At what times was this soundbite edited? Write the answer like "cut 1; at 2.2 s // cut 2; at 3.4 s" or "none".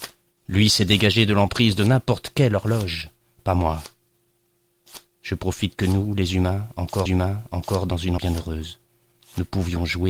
cut 1; at 7.1 s // cut 2; at 8.2 s